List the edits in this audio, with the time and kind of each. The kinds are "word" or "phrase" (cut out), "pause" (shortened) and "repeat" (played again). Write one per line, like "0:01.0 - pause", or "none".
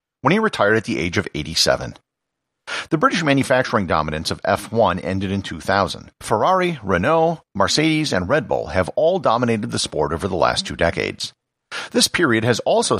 0:06.1 - pause